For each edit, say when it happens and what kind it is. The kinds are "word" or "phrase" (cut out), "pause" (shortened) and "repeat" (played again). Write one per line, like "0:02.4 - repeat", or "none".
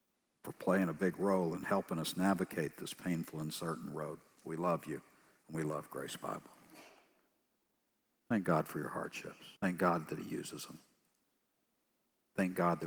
0:09.6 - pause